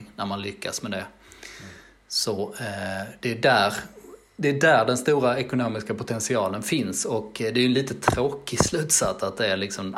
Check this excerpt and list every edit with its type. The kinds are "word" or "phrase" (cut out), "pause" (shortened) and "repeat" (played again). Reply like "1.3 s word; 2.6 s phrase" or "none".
none